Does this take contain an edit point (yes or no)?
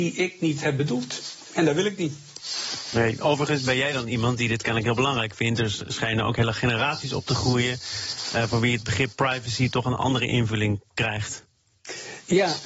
no